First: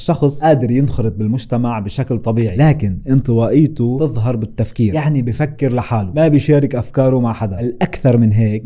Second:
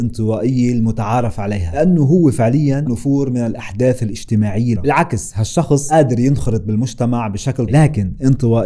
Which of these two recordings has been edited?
second; 3 cuts; at 2.9 s, 4.8 s, 7.7 s

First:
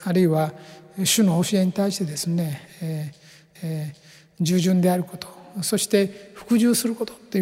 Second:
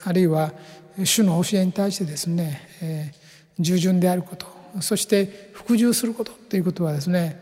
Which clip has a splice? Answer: first; 1 cut; at 3.6 s

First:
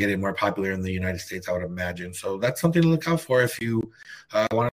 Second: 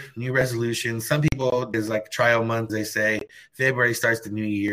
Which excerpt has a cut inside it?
second; 2 cuts; at 1.7 s, 2.7 s

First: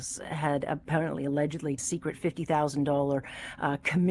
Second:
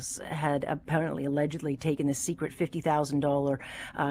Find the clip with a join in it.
first; 1 cut; at 1.8 s

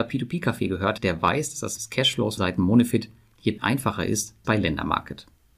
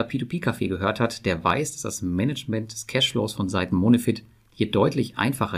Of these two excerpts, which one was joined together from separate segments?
first; 5 cuts; at 1.0 s, 1.8 s, 2.4 s, 3.6 s, 4.4 s

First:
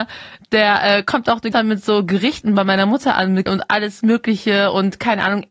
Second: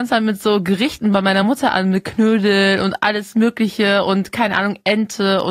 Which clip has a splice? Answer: first; 2 cuts; at 1.5 s, 3.5 s

